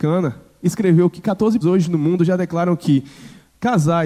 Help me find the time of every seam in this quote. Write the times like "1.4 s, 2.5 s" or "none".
1.6 s